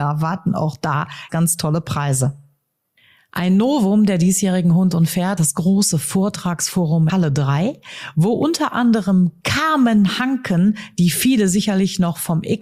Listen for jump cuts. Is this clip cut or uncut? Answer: cut